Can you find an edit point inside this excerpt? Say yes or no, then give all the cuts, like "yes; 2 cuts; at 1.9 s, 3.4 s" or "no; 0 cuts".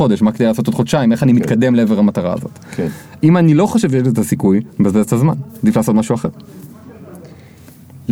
no; 0 cuts